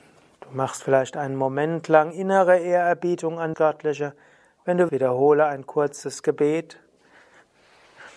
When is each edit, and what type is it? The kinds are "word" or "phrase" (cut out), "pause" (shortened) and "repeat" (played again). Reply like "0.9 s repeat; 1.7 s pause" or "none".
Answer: 3.5 s word; 4.9 s word